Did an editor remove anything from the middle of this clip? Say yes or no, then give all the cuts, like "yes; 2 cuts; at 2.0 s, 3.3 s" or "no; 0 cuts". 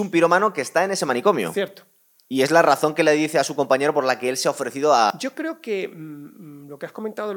no; 0 cuts